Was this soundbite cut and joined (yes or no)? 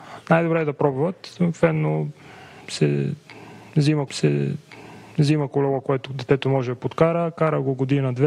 yes